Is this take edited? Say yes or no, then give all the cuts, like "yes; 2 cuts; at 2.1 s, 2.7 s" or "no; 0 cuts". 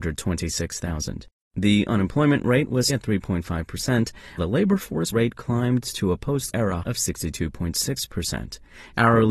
yes; 5 cuts; at 2.9 s, 4.4 s, 5.1 s, 6.5 s, 6.8 s